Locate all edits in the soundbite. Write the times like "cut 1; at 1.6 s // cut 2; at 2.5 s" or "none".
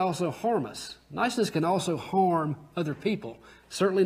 none